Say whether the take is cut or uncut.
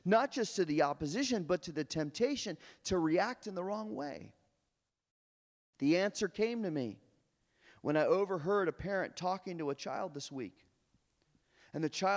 uncut